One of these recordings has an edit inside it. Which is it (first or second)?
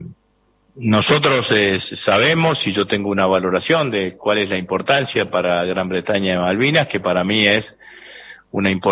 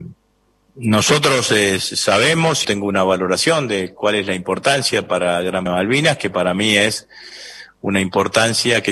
second